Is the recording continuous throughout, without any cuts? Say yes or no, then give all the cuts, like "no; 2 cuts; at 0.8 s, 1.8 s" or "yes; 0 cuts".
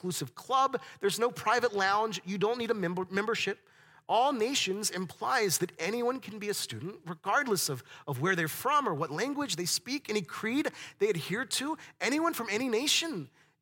yes; 0 cuts